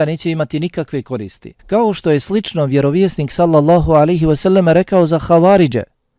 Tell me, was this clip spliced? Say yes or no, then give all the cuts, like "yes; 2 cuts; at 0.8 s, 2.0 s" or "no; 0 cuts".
yes; 1 cut; at 1.6 s